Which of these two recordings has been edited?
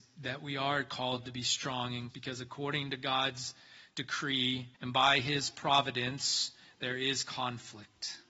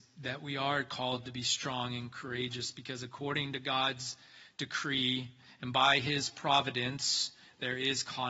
first; 2 cuts; at 2.1 s, 4.7 s

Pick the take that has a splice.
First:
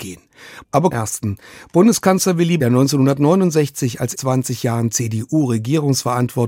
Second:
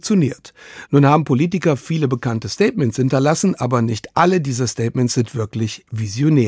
first; 3 cuts; at 0.9 s, 2.6 s, 4.1 s

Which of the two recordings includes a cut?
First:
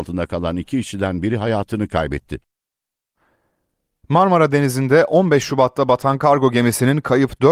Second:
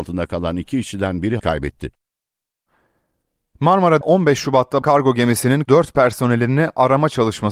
second; 4 cuts; at 1.4 s, 4.0 s, 4.8 s, 5.6 s

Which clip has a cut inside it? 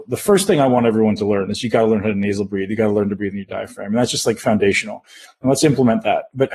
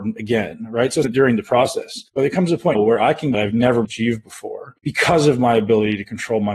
second; 6 cuts; at 1.0 s, 2.1 s, 2.7 s, 3.3 s, 3.8 s, 4.8 s

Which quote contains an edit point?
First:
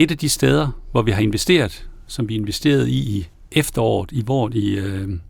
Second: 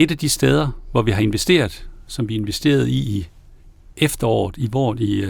first; 1 cut; at 3.3 s

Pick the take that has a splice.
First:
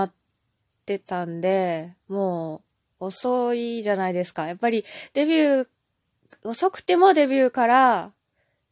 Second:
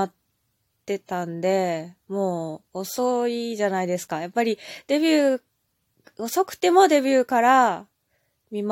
second; 1 cut; at 2.7 s

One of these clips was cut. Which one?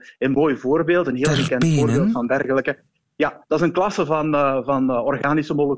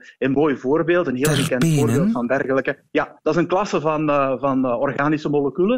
second; 1 cut; at 2.9 s

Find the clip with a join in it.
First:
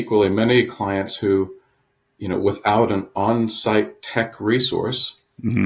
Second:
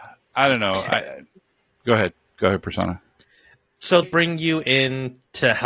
second; 1 cut; at 4.0 s

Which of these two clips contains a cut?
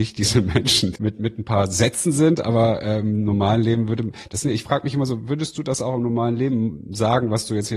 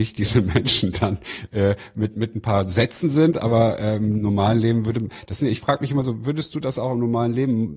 first; 1 cut; at 0.9 s

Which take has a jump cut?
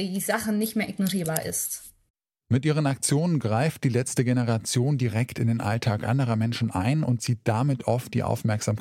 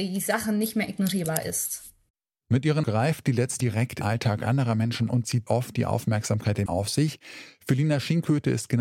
second; 6 cuts; at 2.8 s, 3.6 s, 4.0 s, 5.1 s, 5.5 s, 6.7 s

